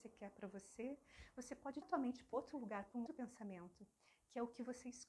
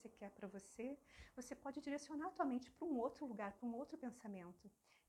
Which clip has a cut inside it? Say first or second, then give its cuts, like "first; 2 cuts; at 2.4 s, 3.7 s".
first; 3 cuts; at 1.8 s, 2.3 s, 3.1 s